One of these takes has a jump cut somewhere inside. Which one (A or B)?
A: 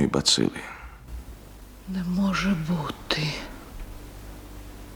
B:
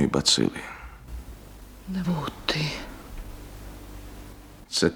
B